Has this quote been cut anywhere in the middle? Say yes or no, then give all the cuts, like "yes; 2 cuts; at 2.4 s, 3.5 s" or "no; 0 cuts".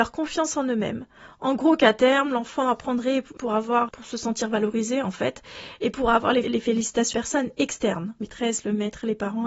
yes; 5 cuts; at 3.4 s, 3.9 s, 6.4 s, 7.1 s, 8.2 s